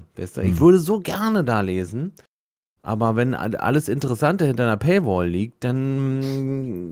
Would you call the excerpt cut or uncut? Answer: uncut